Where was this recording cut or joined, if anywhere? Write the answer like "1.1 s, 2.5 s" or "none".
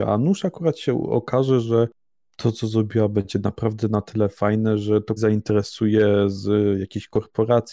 5.2 s